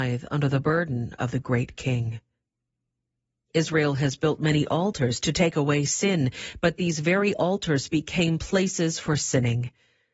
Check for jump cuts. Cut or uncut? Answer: uncut